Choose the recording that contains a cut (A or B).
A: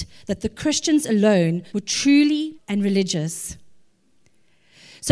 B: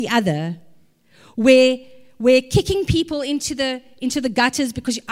A